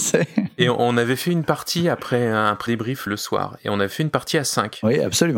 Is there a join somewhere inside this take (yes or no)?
yes